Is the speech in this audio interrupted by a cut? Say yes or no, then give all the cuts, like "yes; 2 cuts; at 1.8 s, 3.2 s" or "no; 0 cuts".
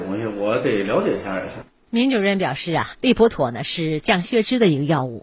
no; 0 cuts